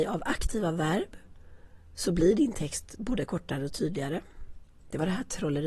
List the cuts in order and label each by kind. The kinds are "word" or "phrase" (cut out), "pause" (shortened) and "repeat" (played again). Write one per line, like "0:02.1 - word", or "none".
none